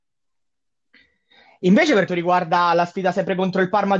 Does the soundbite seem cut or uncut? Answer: cut